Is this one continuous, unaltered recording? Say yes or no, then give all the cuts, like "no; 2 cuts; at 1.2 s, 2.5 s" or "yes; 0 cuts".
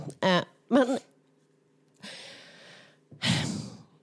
yes; 0 cuts